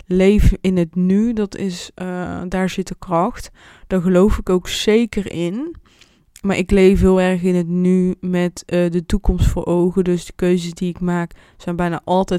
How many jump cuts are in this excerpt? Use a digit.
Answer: 0